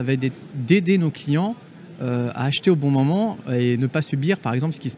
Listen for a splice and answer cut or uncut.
uncut